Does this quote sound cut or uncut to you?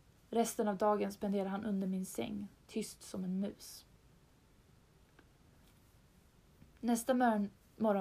uncut